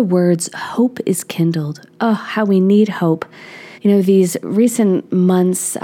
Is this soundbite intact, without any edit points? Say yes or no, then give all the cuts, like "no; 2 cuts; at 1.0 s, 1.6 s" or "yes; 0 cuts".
no; 1 cut; at 3.7 s